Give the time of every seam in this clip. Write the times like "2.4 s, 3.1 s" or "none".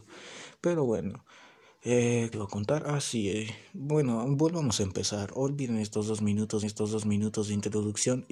2.3 s, 6.6 s